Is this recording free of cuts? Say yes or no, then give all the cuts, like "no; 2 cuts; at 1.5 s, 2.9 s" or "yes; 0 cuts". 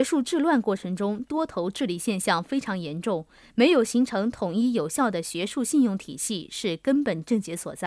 yes; 0 cuts